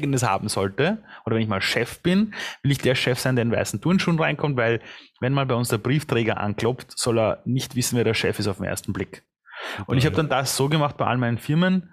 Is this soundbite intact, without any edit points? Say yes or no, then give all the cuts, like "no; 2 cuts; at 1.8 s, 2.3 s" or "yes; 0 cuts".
yes; 0 cuts